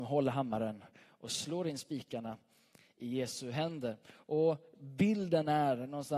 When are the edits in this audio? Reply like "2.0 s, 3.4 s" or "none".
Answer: none